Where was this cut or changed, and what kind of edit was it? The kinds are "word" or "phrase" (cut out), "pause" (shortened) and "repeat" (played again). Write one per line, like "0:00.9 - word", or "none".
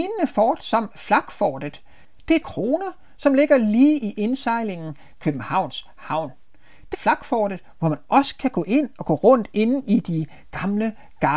0:02.4 - word
0:05.1 - word
0:06.9 - phrase